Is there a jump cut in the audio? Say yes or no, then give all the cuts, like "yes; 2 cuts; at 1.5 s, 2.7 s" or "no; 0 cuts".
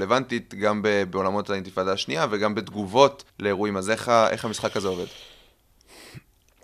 yes; 1 cut; at 3.3 s